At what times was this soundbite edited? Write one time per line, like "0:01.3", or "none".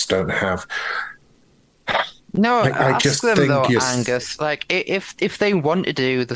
0:02.2